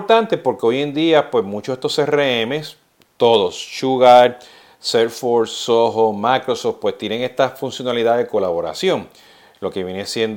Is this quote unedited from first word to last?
yes; 0 cuts

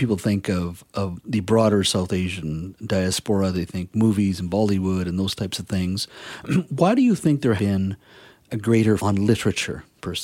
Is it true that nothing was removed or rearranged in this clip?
no; 3 cuts; at 7.6 s, 8.5 s, 9.0 s

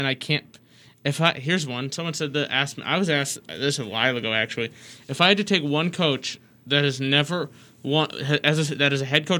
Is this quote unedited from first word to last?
yes; 0 cuts

